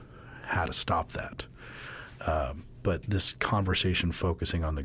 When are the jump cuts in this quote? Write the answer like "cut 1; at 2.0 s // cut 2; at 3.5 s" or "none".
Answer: none